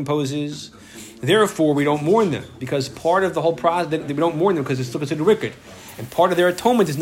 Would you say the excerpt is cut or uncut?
uncut